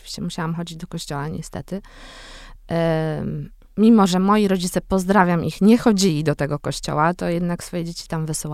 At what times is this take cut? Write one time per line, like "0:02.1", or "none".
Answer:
none